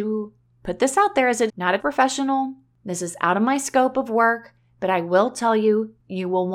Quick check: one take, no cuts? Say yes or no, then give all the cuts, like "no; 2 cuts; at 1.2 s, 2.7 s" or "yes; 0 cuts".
no; 2 cuts; at 1.5 s, 1.8 s